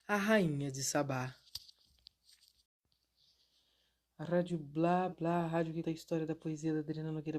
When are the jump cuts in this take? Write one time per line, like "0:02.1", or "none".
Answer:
0:05.1
0:05.8